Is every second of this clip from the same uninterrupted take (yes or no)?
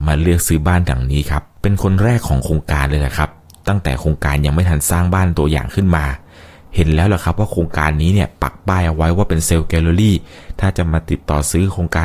yes